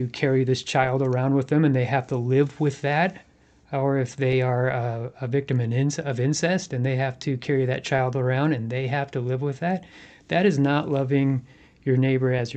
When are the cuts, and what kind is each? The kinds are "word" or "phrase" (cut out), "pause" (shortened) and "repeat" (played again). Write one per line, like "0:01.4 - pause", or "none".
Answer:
none